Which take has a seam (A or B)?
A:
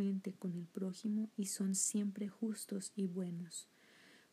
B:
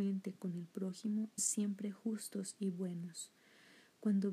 B